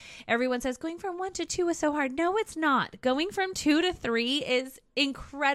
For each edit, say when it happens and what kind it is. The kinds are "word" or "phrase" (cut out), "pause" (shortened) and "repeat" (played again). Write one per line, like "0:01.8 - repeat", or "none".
none